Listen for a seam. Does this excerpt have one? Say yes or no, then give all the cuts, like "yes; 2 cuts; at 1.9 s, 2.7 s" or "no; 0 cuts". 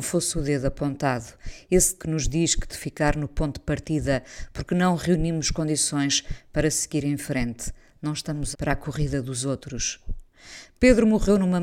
yes; 3 cuts; at 2.0 s, 2.7 s, 8.5 s